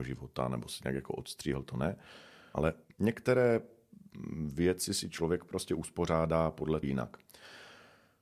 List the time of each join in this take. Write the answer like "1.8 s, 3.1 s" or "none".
6.8 s